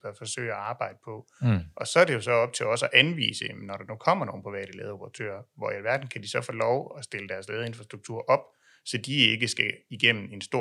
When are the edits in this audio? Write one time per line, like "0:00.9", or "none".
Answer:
none